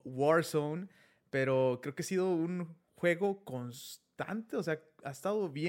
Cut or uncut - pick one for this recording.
uncut